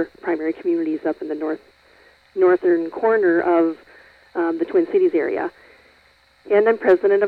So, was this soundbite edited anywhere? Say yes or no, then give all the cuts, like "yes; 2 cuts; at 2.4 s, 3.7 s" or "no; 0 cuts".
no; 0 cuts